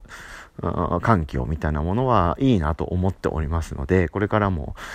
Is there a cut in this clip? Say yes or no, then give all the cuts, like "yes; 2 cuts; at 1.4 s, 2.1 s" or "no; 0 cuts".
no; 0 cuts